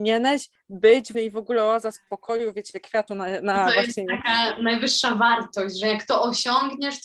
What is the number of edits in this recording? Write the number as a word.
two